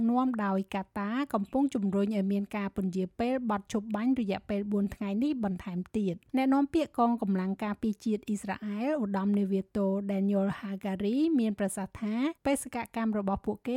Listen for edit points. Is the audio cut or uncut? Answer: cut